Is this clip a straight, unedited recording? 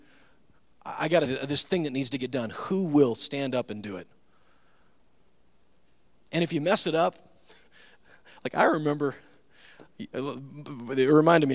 no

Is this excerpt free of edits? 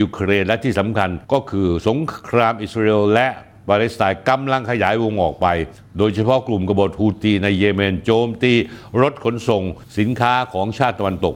no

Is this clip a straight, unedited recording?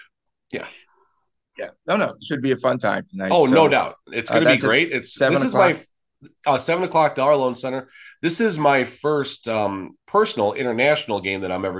no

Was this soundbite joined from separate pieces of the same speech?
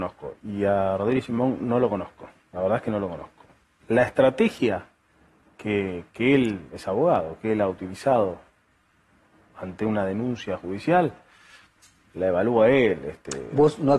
no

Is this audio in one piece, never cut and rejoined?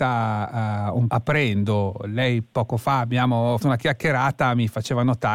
no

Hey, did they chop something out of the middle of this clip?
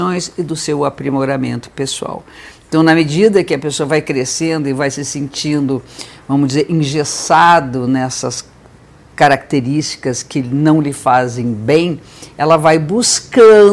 no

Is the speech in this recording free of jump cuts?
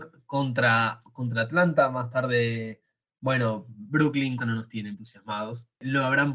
no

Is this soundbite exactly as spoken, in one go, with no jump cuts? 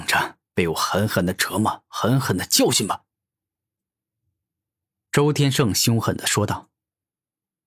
yes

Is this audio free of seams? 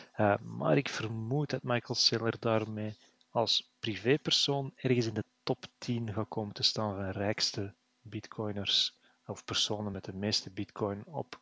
yes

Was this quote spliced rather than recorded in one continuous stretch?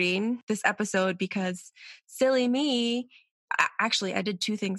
no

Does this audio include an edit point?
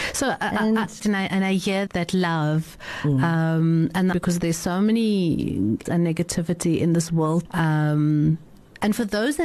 yes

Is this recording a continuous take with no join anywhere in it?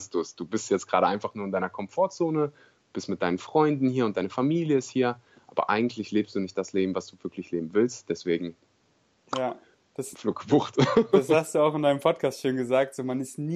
yes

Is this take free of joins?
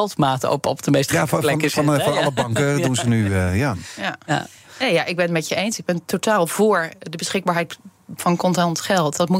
yes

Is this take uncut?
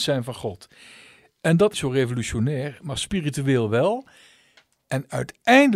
no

